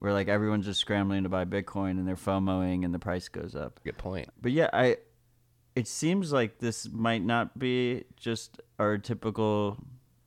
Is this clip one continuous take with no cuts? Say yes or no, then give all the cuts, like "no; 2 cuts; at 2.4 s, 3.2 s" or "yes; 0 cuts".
no; 2 cuts; at 3.9 s, 4.3 s